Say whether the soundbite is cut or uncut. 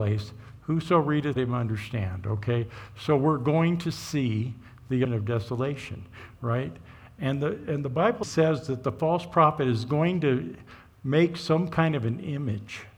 cut